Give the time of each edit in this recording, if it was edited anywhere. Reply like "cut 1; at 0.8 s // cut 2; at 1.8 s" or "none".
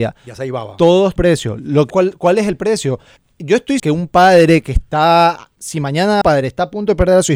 cut 1; at 1.2 s // cut 2; at 1.9 s // cut 3; at 3.2 s // cut 4; at 3.8 s // cut 5; at 5.6 s // cut 6; at 6.2 s